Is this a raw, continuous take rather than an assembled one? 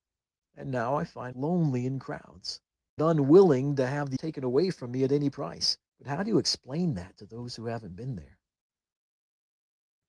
no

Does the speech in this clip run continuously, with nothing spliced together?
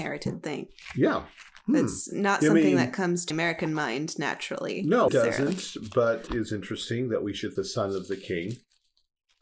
no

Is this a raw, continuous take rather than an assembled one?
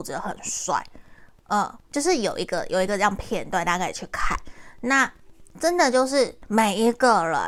no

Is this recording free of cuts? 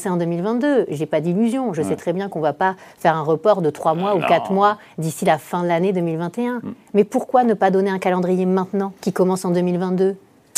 no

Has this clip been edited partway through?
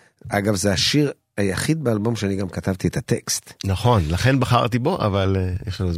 no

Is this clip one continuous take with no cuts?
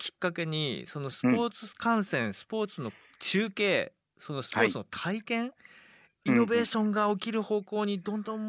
yes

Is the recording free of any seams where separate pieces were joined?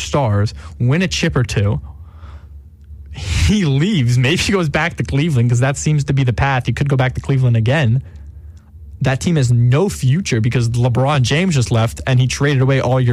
yes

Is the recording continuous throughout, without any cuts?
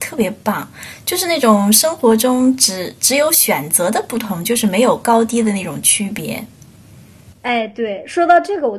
yes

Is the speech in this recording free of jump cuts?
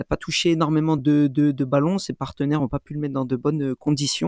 yes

